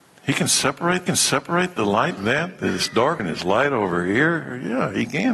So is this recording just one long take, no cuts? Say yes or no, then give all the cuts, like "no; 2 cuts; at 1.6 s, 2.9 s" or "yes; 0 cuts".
no; 3 cuts; at 1.1 s, 2.2 s, 3.2 s